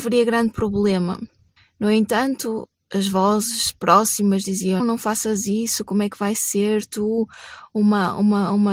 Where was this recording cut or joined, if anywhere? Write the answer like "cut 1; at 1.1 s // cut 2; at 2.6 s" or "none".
cut 1; at 1.6 s // cut 2; at 4.8 s

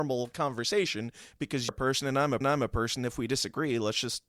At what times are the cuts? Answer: cut 1; at 1.7 s // cut 2; at 2.4 s

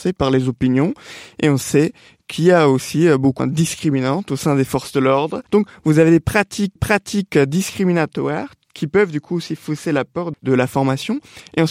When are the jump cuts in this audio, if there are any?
cut 1; at 3.4 s // cut 2; at 5.5 s // cut 3; at 6.8 s // cut 4; at 10.3 s

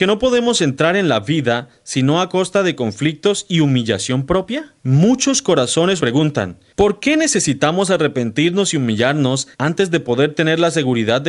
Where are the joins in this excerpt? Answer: cut 1; at 4.8 s // cut 2; at 6.0 s // cut 3; at 9.5 s

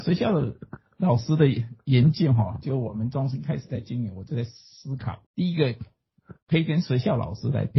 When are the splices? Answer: cut 1; at 5.3 s

